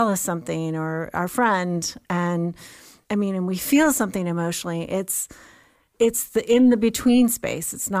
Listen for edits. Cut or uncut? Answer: uncut